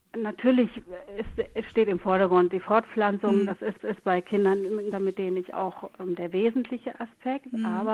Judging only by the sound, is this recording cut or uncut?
cut